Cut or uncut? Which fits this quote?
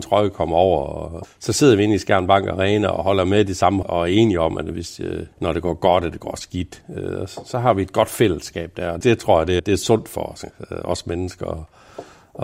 cut